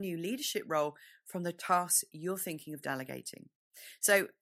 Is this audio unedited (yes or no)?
yes